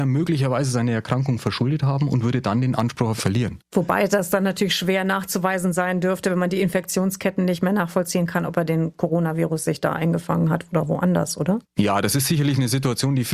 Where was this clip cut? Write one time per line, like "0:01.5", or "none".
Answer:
0:03.2